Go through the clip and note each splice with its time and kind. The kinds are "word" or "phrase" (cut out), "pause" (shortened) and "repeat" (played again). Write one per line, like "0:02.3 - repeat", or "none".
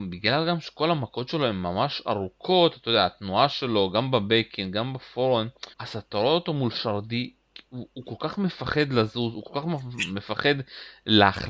0:05.7 - pause